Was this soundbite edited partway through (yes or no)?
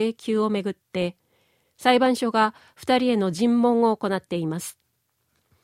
no